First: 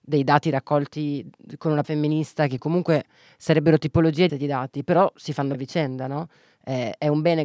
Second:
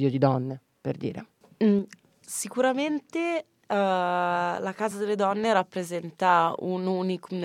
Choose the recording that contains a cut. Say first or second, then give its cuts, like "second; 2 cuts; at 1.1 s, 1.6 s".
first; 4 cuts; at 1.8 s, 2.6 s, 4.3 s, 5.5 s